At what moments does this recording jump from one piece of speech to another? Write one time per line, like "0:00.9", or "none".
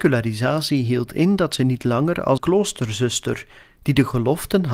0:02.4